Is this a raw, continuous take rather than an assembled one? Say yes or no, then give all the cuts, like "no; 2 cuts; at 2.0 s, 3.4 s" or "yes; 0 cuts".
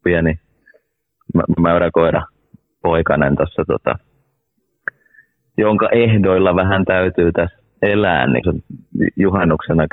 no; 2 cuts; at 1.6 s, 8.4 s